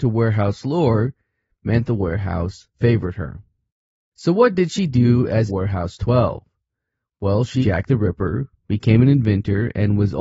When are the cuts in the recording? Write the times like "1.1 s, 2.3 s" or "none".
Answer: 1.9 s, 2.7 s, 5.5 s, 7.6 s